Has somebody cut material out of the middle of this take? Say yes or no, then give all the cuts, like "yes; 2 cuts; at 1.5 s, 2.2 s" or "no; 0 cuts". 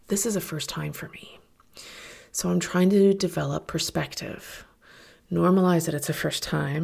no; 0 cuts